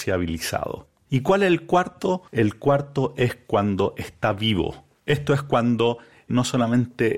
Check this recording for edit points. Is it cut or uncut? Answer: cut